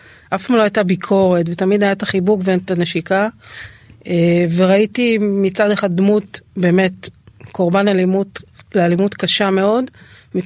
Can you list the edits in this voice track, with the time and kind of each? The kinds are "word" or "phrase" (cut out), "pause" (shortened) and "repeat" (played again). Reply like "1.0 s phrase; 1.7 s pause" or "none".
8.6 s pause